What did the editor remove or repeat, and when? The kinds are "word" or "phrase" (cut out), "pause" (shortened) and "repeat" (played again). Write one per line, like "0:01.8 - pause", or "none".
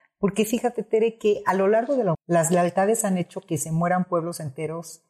0:02.1 - word